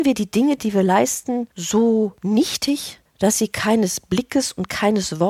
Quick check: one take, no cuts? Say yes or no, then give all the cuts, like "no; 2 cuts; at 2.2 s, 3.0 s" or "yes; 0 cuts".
no; 1 cut; at 3.1 s